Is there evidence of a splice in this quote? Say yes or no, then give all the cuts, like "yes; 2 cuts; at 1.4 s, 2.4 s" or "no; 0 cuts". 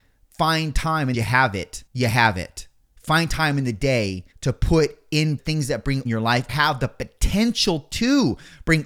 yes; 7 cuts; at 1.1 s, 1.9 s, 2.8 s, 4.3 s, 5.4 s, 6.1 s, 6.5 s